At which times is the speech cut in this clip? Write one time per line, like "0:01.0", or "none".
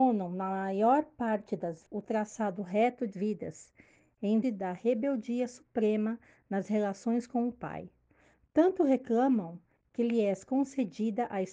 0:01.9
0:03.1
0:04.4